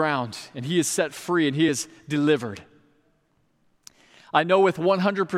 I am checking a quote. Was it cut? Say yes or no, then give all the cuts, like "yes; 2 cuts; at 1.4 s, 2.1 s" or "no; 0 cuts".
no; 0 cuts